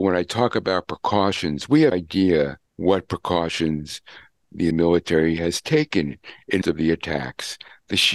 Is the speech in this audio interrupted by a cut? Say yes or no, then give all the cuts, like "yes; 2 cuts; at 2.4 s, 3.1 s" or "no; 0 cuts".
yes; 4 cuts; at 1.9 s, 2.7 s, 4.7 s, 6.6 s